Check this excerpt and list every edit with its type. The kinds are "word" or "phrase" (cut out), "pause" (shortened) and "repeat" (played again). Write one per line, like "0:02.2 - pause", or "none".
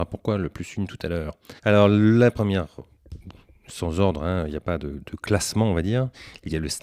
0:01.6 - pause